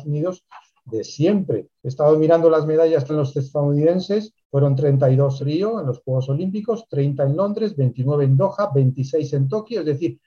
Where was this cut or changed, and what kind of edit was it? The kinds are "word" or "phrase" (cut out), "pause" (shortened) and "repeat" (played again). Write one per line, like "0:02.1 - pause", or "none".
0:01.8 - pause
0:03.1 - word
0:04.4 - pause
0:05.4 - word